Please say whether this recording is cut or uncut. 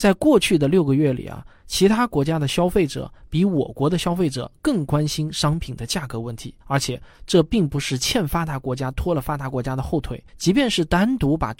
cut